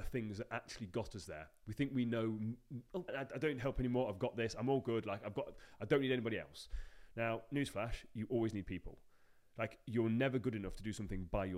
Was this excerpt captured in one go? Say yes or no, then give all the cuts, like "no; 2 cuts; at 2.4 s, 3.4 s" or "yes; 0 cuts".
no; 1 cut; at 3.1 s